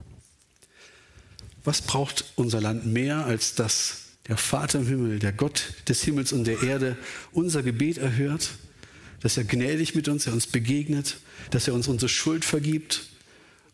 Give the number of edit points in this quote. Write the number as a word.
two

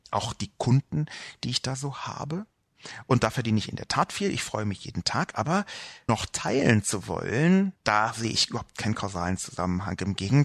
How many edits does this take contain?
one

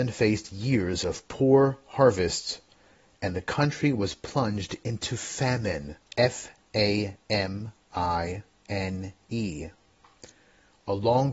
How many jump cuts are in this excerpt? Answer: one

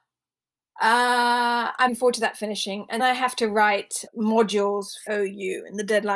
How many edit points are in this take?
four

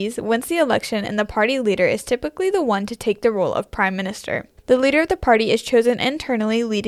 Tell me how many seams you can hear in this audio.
one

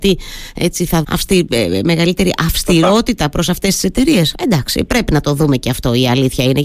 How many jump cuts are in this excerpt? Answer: one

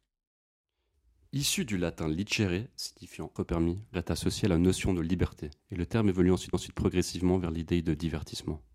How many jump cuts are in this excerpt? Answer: four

